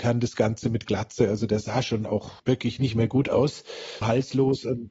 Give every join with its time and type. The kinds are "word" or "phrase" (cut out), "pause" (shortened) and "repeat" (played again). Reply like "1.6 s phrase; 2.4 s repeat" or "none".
2.4 s pause; 4.0 s word